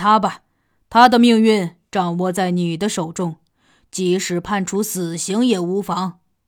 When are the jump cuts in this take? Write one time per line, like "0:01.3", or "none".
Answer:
none

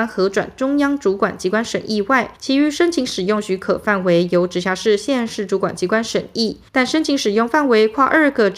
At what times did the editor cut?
0:02.4
0:06.7

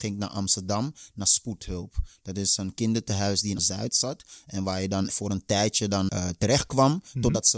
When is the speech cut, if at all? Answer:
0:03.6
0:05.1
0:06.1

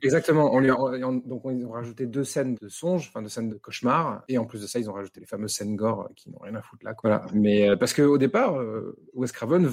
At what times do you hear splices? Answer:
0:02.5
0:03.5
0:05.2

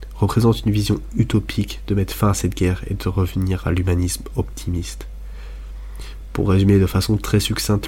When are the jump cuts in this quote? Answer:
none

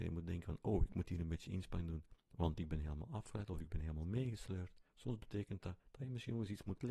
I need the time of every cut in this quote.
0:04.9
0:05.8

